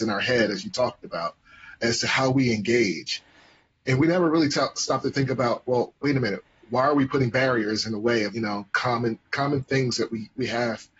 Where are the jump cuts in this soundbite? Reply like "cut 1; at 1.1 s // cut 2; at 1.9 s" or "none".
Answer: cut 1; at 8.3 s